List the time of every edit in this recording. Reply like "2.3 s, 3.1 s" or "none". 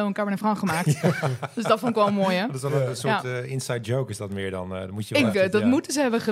5.3 s